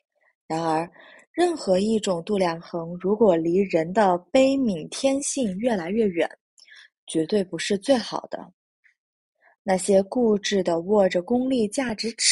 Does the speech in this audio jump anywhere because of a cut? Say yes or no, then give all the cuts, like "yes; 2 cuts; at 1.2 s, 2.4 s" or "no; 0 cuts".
no; 0 cuts